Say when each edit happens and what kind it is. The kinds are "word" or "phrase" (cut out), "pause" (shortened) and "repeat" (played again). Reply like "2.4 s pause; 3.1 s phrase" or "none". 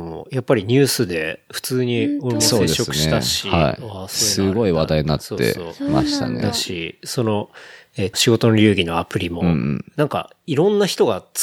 8.1 s word